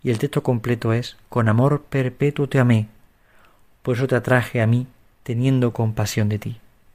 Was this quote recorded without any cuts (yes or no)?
yes